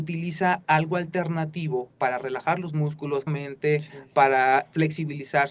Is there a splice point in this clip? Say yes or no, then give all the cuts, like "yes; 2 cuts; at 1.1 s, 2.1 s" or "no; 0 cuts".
yes; 2 cuts; at 1.9 s, 3.3 s